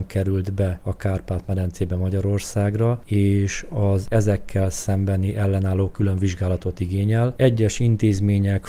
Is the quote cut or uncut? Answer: cut